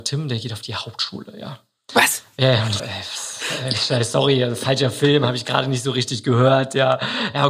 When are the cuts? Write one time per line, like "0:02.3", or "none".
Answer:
0:02.8